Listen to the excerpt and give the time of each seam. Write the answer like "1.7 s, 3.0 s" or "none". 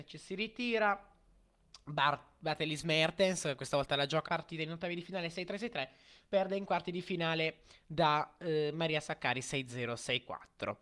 4.2 s